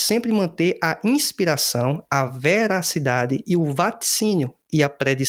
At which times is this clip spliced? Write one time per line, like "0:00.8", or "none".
none